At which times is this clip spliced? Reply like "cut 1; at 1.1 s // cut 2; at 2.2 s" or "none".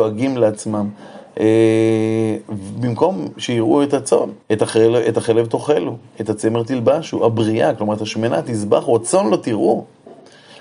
cut 1; at 4.4 s